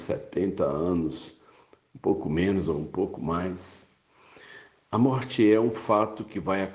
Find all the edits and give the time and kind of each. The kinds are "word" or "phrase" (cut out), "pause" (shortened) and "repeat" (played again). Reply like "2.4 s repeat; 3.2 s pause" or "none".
none

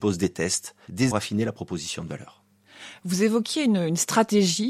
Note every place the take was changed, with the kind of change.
1.1 s phrase

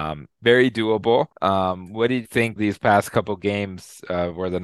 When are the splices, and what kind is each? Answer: 1.3 s pause; 2.2 s word; 2.6 s word

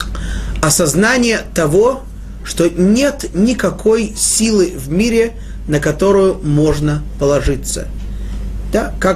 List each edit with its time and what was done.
none

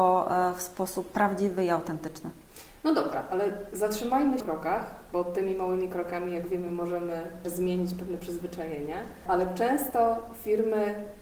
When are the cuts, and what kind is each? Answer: 4.4 s phrase

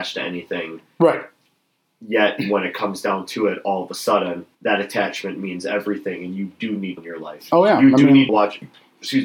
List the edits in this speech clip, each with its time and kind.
4.5 s pause; 7.0 s word; 8.3 s word

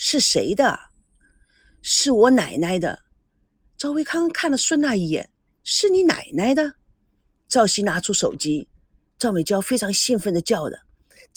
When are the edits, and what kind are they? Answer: none

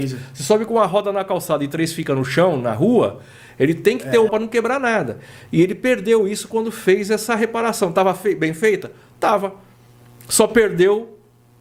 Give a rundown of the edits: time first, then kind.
4.3 s phrase

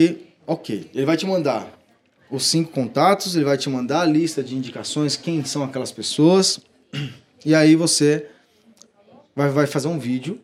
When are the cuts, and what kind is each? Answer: none

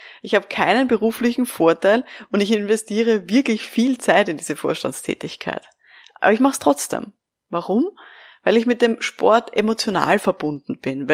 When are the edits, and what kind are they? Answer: none

